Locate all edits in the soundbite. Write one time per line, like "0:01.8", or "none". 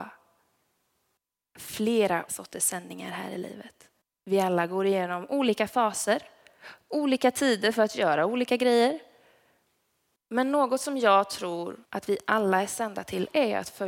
0:02.3
0:04.0
0:11.8

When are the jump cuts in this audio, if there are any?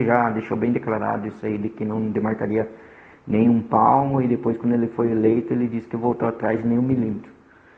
none

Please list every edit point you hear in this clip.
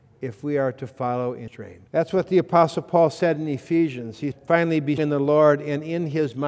0:01.5
0:01.9
0:04.3
0:05.0

